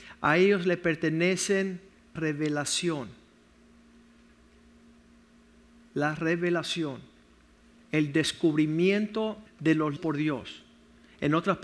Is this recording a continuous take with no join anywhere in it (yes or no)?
no